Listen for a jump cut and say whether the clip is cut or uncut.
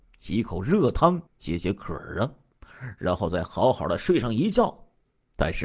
cut